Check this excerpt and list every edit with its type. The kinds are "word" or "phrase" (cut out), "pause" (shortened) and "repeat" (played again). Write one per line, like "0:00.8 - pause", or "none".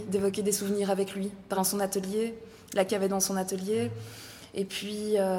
0:01.5 - word
0:02.9 - word